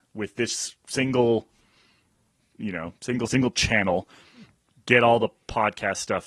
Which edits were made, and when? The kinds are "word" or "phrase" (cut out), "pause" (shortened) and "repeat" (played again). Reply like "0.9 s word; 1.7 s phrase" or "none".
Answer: 3.3 s word